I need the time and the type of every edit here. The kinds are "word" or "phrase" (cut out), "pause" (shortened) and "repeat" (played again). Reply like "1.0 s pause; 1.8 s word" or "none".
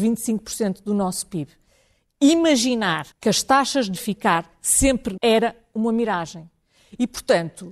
3.1 s pause; 4.0 s phrase; 5.2 s word